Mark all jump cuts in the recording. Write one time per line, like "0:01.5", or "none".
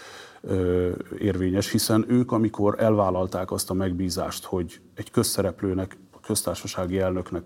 none